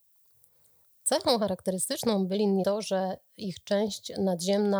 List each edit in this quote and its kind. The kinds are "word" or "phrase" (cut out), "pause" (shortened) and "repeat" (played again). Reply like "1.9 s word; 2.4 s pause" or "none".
2.6 s word